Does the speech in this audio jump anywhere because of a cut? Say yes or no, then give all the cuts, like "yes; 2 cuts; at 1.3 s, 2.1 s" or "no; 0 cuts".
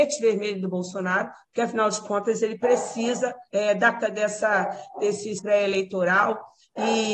yes; 3 cuts; at 3.5 s, 4.0 s, 5.4 s